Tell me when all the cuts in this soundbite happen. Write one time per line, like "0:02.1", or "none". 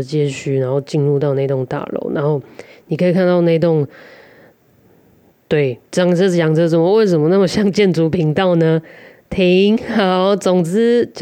0:05.9